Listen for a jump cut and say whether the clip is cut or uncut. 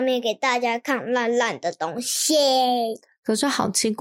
uncut